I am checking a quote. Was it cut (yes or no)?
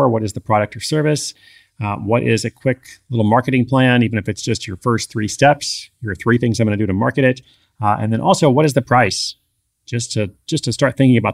no